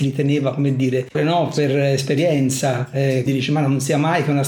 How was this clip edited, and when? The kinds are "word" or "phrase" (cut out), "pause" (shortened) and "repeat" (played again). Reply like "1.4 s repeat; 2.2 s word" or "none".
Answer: 1.1 s word; 3.3 s word

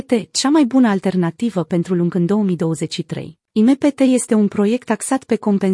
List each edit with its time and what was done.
3.5 s pause

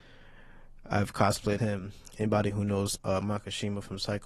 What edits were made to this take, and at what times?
1.6 s word; 3.0 s word

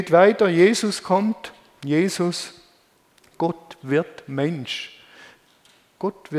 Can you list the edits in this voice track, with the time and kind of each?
none

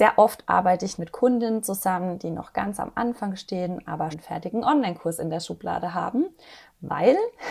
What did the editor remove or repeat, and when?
1.0 s word; 4.1 s word

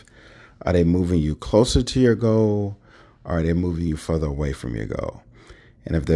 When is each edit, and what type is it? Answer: none

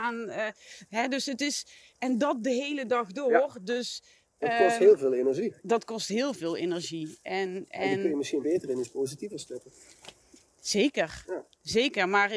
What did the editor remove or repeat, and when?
none

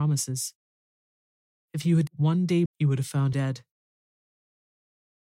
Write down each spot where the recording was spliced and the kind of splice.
2.1 s word; 2.7 s word; 3.3 s word

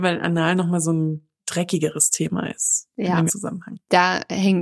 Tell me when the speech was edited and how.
1.4 s pause; 3.3 s word

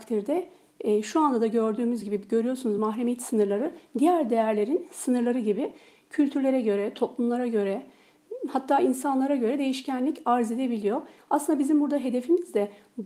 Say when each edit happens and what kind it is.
none

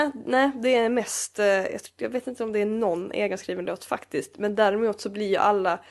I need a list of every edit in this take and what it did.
none

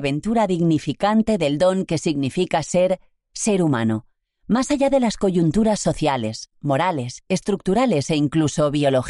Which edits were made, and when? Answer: none

